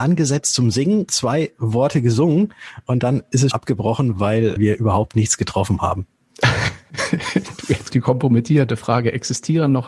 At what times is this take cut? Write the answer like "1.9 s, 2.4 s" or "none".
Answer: 1.1 s, 3.5 s, 4.6 s, 7.9 s